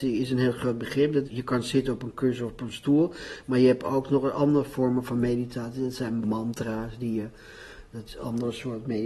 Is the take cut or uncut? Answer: cut